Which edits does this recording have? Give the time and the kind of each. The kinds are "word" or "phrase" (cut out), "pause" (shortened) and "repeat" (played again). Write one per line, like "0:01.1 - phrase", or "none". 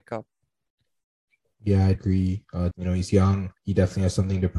0:01.9 - word
0:02.7 - word
0:03.6 - pause